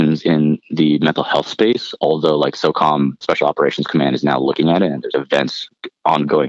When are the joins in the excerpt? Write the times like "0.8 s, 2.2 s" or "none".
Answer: 3.2 s, 5.1 s